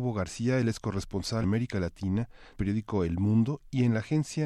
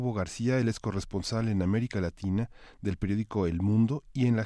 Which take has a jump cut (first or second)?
first